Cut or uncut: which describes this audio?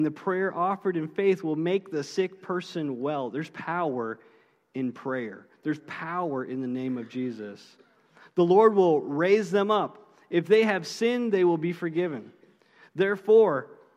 uncut